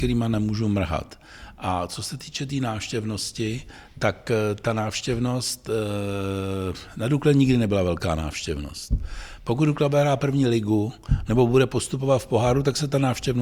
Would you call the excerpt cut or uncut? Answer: uncut